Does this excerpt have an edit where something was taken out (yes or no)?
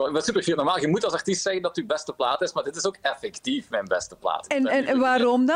no